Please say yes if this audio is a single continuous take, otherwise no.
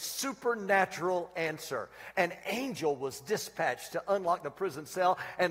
yes